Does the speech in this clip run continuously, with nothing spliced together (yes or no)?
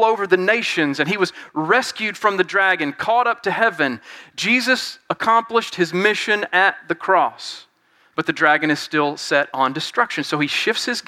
yes